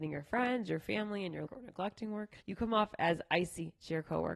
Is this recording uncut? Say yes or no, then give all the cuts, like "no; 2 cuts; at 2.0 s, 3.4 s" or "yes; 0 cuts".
no; 2 cuts; at 1.5 s, 2.4 s